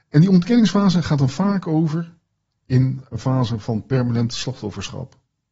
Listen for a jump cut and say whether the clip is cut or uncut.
uncut